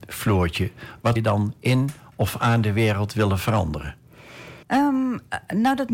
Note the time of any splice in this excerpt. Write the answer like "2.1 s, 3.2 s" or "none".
1.2 s, 4.6 s